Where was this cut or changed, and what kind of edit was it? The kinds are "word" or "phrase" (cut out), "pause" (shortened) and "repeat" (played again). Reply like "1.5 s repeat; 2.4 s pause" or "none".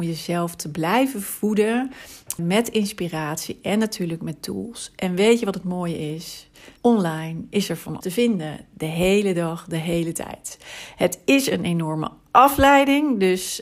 2.4 s word; 6.8 s pause; 8.0 s word